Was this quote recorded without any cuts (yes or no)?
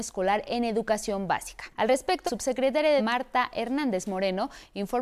no